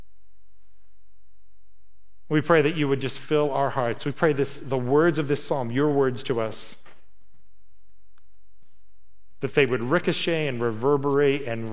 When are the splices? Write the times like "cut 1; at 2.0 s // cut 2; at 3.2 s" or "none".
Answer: none